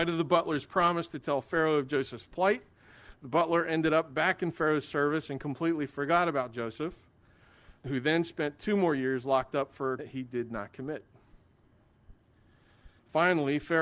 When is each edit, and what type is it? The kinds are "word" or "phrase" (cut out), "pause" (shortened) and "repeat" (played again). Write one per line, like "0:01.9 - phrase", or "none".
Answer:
0:07.8 - word
0:10.0 - word